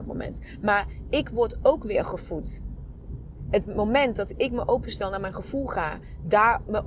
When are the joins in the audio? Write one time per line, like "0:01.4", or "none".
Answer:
none